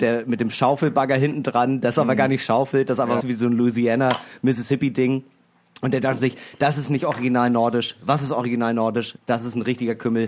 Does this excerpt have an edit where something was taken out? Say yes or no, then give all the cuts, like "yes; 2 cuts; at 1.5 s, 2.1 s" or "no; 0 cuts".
yes; 1 cut; at 3.2 s